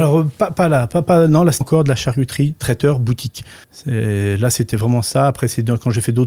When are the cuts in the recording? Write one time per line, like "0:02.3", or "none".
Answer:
0:01.6
0:03.6